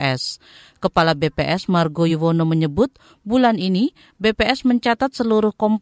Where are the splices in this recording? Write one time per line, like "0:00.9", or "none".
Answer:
none